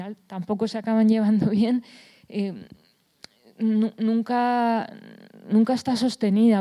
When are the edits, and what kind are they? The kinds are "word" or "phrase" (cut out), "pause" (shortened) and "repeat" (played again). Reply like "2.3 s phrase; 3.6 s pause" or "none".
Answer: none